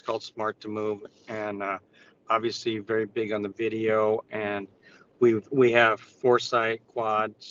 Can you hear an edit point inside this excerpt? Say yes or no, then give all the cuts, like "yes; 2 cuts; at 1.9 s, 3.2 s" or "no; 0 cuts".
no; 0 cuts